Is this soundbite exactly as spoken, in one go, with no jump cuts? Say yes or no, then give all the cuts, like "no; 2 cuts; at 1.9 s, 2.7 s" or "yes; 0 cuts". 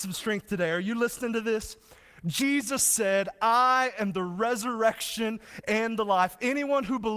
yes; 0 cuts